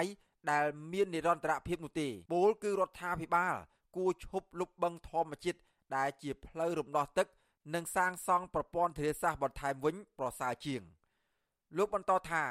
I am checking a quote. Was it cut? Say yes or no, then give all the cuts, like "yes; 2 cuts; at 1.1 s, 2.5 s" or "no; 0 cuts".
yes; 1 cut; at 2.3 s